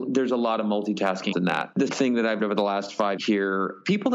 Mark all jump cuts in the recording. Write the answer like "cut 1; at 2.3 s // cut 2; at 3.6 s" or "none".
cut 1; at 1.3 s // cut 2; at 1.9 s // cut 3; at 2.4 s // cut 4; at 3.2 s

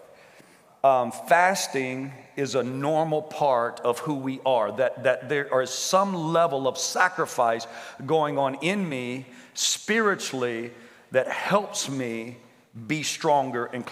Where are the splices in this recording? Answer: none

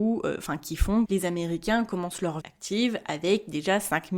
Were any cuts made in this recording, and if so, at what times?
cut 1; at 1.1 s // cut 2; at 2.4 s

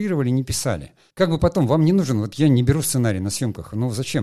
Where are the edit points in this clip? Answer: cut 1; at 1.1 s

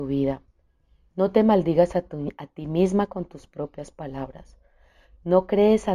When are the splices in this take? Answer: none

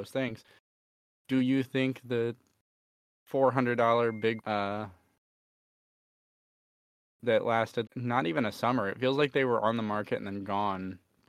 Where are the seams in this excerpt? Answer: cut 1; at 4.4 s // cut 2; at 7.9 s

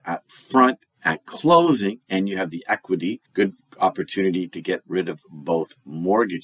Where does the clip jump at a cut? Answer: cut 1; at 3.3 s

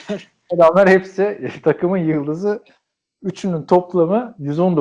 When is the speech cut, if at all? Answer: none

